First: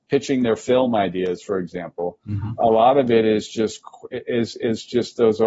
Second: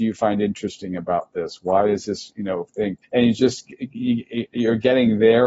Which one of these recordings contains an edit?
second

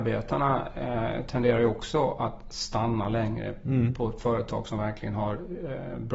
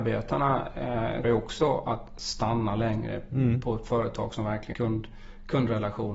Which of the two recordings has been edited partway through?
second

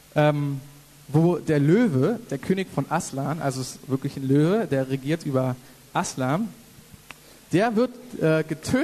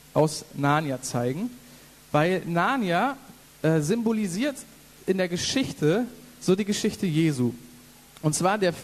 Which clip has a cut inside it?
second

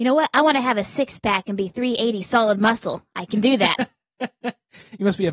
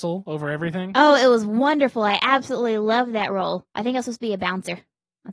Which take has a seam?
second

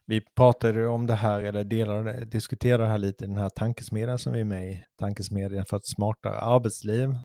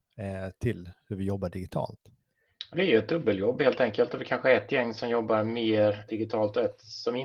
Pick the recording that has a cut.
second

